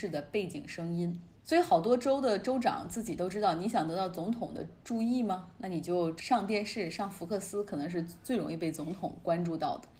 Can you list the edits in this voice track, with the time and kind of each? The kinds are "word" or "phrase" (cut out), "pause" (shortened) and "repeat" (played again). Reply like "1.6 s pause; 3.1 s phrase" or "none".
1.4 s pause